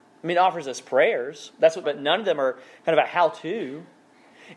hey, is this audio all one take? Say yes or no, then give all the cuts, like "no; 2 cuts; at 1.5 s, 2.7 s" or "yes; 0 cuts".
no; 1 cut; at 1.8 s